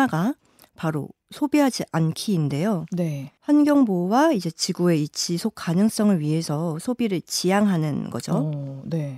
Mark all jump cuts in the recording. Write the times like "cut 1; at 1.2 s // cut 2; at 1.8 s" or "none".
cut 1; at 3.4 s